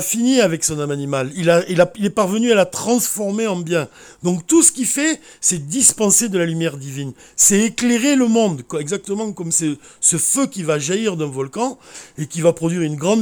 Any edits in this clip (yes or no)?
no